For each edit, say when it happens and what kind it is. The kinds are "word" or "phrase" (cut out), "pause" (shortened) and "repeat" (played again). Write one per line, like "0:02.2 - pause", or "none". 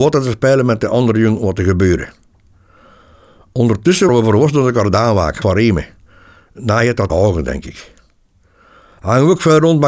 0:04.1 - word
0:05.4 - word
0:07.1 - word